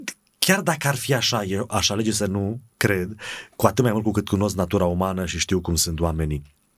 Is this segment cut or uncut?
cut